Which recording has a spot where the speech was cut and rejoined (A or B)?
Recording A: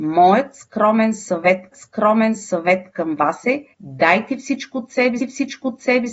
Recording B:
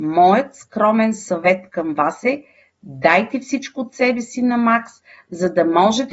A